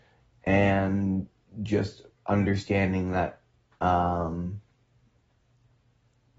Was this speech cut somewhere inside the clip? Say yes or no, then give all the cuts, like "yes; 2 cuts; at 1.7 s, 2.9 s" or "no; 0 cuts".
no; 0 cuts